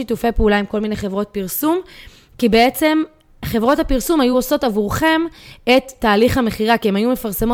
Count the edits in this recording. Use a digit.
0